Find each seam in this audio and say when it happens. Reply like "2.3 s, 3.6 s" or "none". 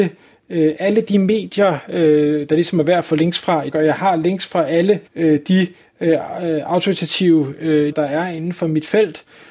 3.7 s, 5.1 s, 7.9 s